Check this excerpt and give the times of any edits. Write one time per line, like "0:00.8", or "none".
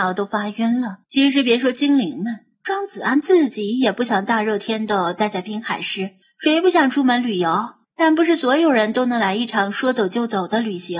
0:01.0
0:02.5
0:06.2
0:07.8